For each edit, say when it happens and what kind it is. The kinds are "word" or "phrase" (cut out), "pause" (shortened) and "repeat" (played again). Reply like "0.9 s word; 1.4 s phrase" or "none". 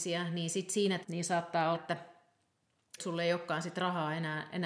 1.0 s word; 1.7 s word; 3.0 s word